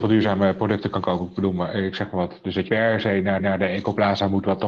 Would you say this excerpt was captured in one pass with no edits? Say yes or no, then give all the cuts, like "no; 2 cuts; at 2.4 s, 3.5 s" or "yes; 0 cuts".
no; 2 cuts; at 2.7 s, 3.4 s